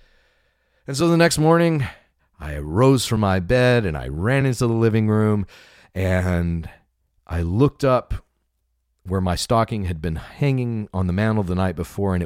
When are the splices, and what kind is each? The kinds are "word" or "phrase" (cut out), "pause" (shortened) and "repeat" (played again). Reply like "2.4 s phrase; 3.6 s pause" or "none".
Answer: none